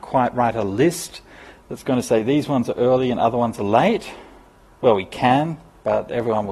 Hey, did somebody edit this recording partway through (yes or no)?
no